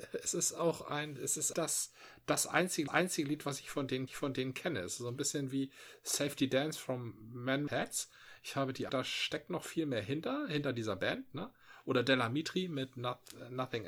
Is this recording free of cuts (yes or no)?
no